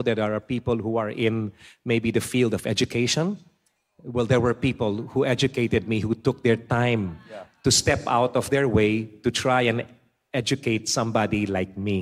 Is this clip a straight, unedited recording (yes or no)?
yes